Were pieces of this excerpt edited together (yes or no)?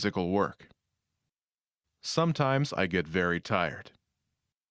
no